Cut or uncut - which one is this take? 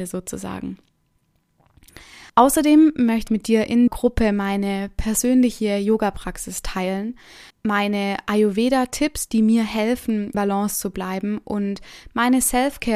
cut